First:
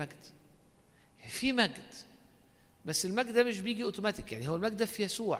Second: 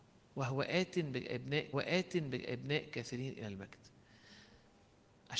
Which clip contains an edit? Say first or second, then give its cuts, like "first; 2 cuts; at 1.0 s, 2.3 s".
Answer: second; 1 cut; at 1.7 s